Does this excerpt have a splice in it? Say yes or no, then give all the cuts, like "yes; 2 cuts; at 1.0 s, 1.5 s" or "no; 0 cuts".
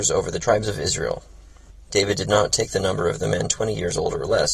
no; 0 cuts